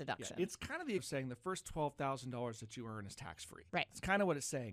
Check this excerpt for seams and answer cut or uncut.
cut